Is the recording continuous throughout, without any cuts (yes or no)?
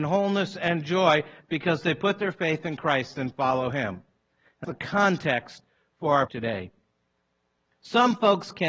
no